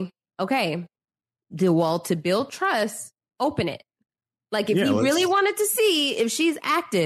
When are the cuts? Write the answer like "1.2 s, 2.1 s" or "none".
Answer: none